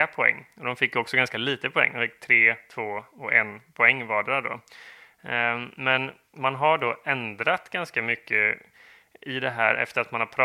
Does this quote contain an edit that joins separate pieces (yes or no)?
no